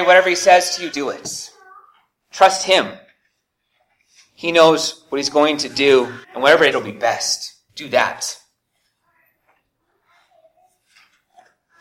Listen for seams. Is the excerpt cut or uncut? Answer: cut